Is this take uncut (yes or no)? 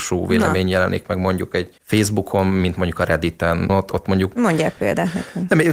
no